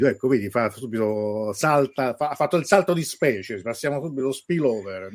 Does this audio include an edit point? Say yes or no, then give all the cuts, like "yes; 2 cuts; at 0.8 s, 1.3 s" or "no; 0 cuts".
no; 0 cuts